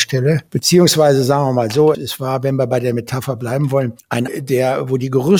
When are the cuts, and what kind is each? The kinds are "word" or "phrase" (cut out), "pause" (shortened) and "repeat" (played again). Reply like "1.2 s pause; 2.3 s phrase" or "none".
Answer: 1.9 s word; 4.3 s word